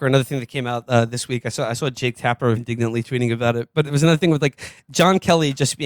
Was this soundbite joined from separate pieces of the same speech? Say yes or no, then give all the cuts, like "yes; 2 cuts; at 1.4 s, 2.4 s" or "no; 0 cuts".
yes; 1 cut; at 2.6 s